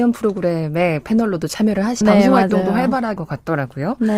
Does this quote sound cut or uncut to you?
cut